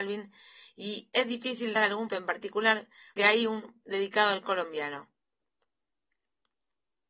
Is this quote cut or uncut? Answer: cut